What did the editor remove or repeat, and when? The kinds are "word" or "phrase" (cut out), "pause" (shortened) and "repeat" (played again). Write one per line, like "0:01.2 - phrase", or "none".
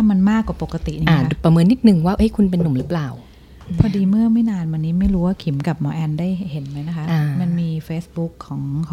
none